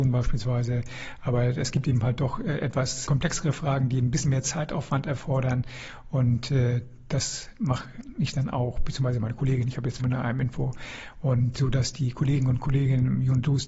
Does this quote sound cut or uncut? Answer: cut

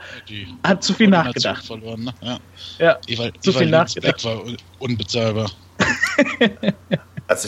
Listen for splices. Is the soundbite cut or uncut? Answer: uncut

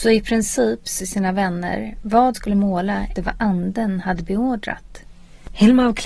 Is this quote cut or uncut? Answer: cut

